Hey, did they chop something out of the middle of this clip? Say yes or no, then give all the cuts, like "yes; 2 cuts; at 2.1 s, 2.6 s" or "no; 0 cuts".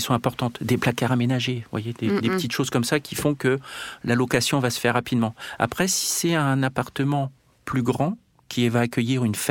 no; 0 cuts